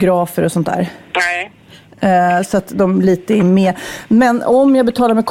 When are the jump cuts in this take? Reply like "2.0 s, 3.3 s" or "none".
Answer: none